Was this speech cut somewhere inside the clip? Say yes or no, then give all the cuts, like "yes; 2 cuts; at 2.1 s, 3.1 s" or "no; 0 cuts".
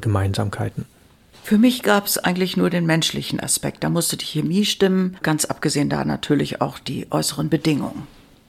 no; 0 cuts